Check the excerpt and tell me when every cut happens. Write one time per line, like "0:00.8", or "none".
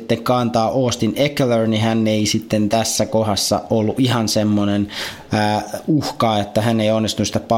none

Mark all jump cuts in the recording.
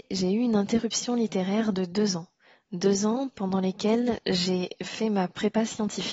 none

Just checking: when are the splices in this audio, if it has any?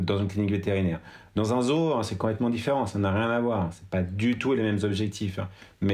none

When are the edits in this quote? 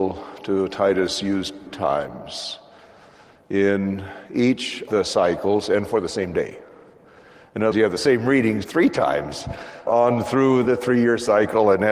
0:01.7
0:04.9
0:07.7
0:08.6
0:09.9
0:10.6

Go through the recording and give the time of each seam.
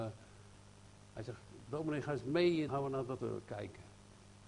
0:02.7
0:03.2

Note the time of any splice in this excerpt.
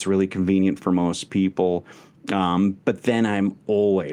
none

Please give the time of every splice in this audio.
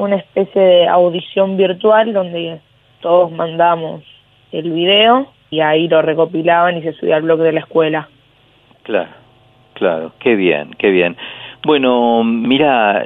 0:05.5

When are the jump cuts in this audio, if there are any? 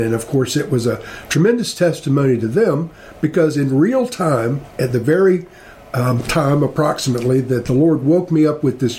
none

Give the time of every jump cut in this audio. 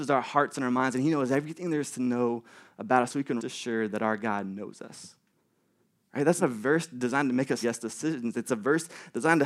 0:03.4
0:06.4
0:07.6

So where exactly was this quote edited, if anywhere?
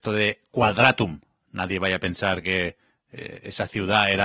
none

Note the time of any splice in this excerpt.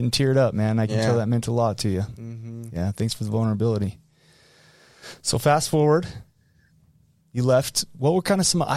none

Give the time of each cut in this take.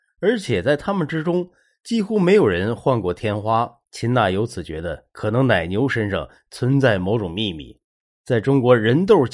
0:03.8

